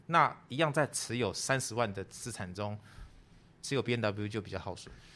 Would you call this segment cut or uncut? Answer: uncut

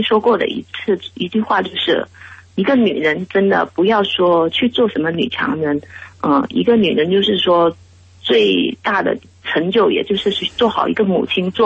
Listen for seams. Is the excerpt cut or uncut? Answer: uncut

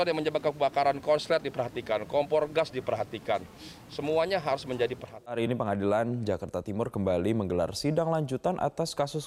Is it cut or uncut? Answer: uncut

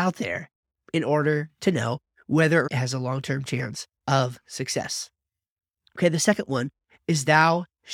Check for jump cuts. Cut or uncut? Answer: cut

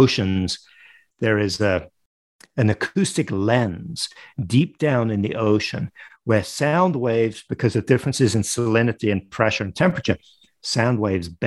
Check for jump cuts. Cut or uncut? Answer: uncut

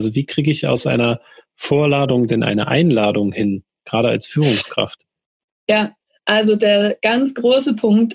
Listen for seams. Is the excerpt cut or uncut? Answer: uncut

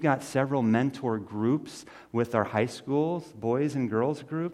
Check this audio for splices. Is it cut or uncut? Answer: uncut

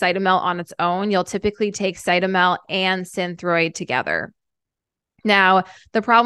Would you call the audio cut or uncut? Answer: uncut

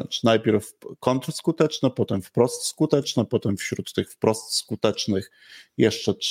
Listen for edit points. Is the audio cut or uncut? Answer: uncut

